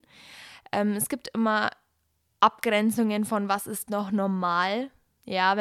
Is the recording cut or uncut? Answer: uncut